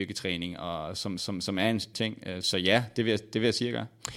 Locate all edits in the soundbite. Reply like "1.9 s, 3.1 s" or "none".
1.2 s, 1.9 s, 2.4 s